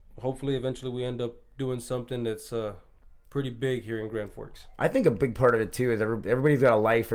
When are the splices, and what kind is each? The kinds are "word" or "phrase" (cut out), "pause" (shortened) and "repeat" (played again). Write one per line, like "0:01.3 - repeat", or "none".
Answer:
none